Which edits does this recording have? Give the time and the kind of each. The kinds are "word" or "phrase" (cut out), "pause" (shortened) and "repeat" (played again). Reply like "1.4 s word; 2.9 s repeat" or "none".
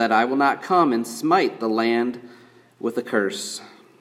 none